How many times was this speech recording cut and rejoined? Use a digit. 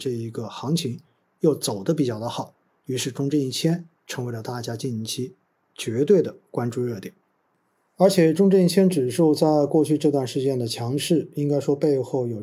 0